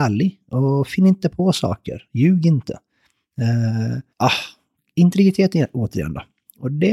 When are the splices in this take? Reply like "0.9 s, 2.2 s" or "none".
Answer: 4.1 s